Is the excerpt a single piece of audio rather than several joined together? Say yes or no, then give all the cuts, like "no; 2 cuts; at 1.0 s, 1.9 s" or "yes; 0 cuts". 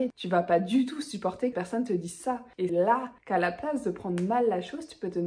no; 3 cuts; at 1.5 s, 2.7 s, 3.2 s